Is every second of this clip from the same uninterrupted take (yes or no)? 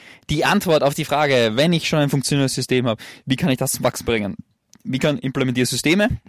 yes